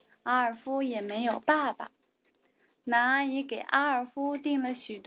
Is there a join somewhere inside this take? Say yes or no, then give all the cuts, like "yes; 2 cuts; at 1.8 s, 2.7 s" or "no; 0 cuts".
no; 0 cuts